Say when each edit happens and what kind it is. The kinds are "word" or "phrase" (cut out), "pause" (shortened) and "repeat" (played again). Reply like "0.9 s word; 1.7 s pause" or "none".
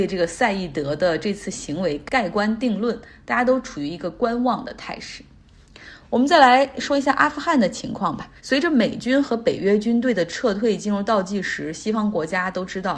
8.4 s pause